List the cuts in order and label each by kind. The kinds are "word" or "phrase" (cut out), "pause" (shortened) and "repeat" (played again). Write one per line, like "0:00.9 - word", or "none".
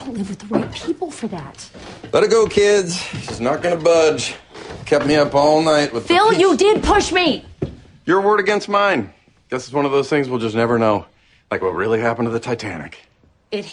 none